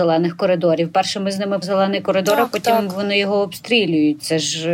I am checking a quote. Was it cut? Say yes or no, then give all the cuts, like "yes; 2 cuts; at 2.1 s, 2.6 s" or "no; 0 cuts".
yes; 1 cut; at 1.6 s